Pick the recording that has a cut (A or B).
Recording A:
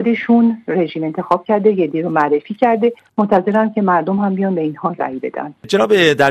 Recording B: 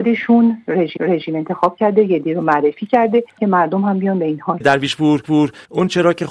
B